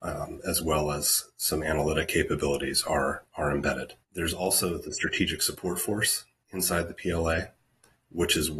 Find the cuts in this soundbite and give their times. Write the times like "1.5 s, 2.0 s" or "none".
4.0 s